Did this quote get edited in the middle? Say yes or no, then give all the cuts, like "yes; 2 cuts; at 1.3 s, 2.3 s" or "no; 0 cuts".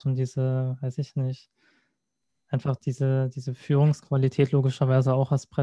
no; 0 cuts